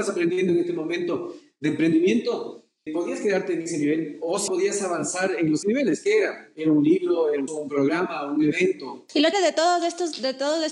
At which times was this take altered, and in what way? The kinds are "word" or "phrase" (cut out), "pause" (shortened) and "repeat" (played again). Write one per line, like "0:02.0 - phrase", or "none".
0:02.9 - word
0:04.5 - word
0:05.6 - word
0:07.5 - word
0:09.3 - word